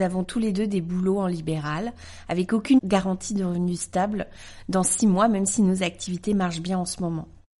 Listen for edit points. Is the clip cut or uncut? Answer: uncut